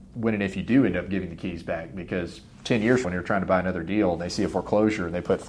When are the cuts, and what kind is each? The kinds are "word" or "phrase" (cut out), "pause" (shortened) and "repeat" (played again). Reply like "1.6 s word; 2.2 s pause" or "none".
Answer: 3.0 s word